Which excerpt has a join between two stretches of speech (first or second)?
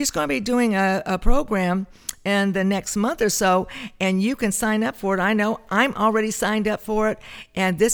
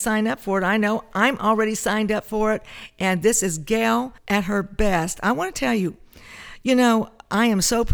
second